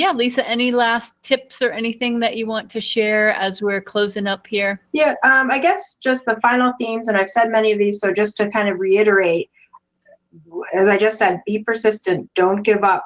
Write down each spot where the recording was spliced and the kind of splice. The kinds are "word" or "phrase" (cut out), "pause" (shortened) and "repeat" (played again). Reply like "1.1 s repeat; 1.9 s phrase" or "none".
4.8 s pause